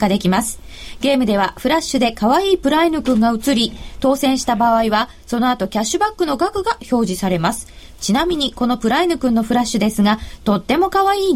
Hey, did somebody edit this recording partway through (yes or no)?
no